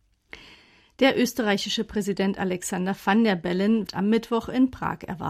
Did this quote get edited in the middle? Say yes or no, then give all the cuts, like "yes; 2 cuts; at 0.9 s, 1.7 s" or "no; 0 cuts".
yes; 1 cut; at 3.9 s